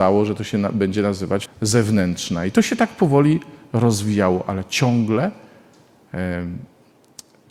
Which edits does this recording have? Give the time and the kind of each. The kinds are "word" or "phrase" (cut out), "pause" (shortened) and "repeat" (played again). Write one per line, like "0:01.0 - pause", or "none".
0:01.5 - word